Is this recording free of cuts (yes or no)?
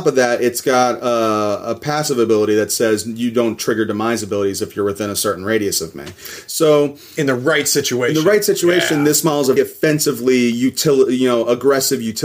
no